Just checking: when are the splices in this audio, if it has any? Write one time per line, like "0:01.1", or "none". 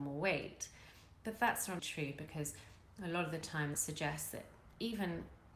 0:01.8
0:03.7